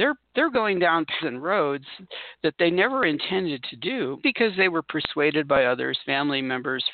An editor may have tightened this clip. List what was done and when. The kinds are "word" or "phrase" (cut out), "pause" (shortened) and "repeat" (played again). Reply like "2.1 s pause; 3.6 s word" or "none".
1.2 s word; 4.2 s word